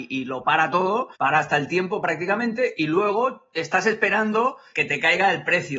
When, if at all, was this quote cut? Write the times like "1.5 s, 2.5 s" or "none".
1.2 s